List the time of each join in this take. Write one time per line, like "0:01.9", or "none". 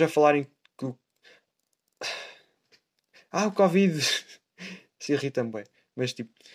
0:05.1